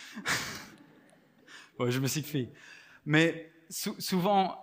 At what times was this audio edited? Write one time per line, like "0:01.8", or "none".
0:02.2